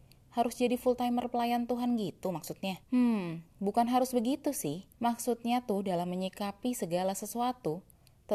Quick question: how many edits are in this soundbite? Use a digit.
2